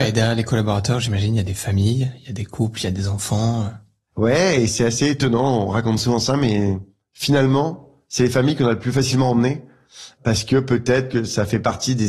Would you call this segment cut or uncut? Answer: uncut